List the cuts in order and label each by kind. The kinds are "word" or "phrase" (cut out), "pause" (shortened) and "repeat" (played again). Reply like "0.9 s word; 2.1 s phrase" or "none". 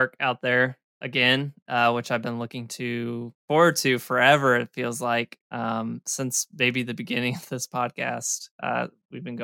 3.4 s pause; 5.4 s pause; 8.5 s pause

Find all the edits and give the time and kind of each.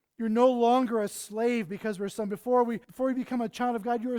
2.8 s pause

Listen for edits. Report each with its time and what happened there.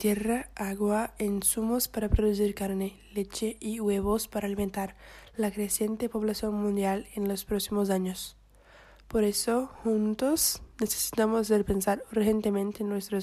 none

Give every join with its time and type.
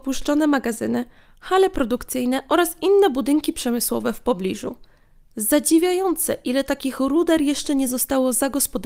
none

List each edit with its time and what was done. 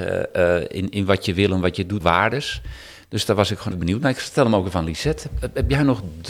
2.0 s word; 3.7 s word

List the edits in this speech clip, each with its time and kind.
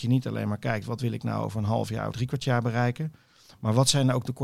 2.1 s word

